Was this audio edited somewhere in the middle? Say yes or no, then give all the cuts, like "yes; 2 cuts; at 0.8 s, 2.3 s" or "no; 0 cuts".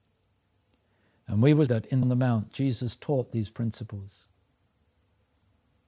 yes; 2 cuts; at 1.7 s, 2.0 s